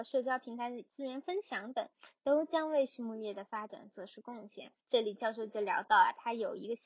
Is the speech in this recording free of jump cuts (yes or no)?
no